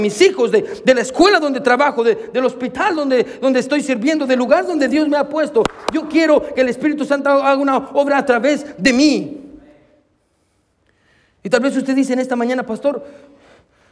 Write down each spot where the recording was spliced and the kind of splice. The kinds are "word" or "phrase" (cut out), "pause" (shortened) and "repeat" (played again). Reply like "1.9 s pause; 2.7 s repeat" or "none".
none